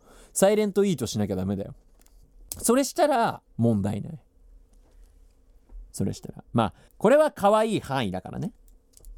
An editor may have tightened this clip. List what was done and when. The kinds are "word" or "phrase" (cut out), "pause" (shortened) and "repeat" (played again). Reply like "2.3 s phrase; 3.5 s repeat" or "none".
3.5 s pause; 5.9 s pause; 6.9 s pause